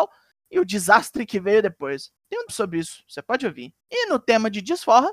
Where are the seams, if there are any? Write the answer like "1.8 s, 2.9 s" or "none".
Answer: 2.2 s, 2.5 s, 3.8 s